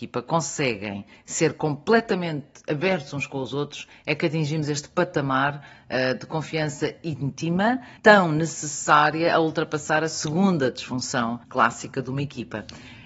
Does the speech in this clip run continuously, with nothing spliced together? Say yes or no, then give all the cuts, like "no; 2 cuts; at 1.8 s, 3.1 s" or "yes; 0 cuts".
no; 2 cuts; at 8.0 s, 11.4 s